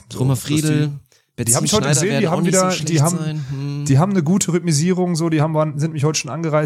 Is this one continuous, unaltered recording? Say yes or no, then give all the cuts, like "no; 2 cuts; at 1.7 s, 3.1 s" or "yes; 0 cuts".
yes; 0 cuts